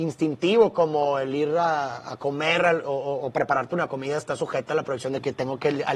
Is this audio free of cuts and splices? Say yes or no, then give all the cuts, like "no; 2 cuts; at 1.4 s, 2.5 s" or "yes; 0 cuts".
yes; 0 cuts